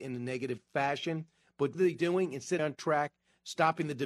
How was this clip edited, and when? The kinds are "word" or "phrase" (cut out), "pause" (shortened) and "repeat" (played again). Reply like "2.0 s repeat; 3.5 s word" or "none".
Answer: 1.7 s word; 2.6 s phrase

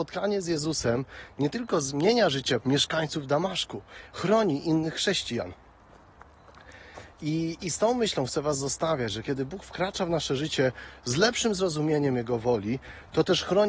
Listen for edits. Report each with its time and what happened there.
2.6 s phrase

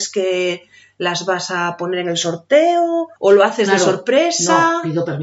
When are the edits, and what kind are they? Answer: 3.2 s pause

